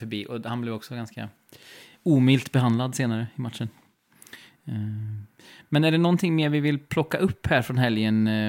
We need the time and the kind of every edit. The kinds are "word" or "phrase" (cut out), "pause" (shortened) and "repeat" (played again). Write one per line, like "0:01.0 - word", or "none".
none